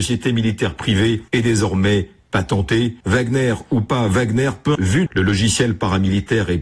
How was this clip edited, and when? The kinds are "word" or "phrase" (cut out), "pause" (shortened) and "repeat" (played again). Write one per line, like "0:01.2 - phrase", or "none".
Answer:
0:01.3 - pause
0:03.0 - pause
0:04.8 - word
0:05.1 - word